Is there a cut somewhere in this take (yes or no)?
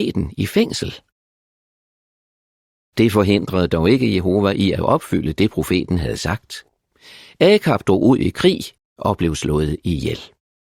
yes